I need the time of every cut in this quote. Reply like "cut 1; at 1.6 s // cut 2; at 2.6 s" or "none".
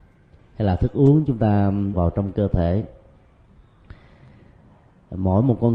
cut 1; at 1.9 s